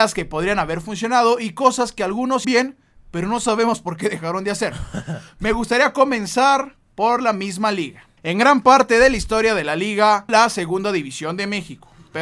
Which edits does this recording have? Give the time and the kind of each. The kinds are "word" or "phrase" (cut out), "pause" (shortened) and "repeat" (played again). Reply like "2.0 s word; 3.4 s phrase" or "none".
2.4 s word; 6.8 s pause; 8.2 s pause; 10.3 s phrase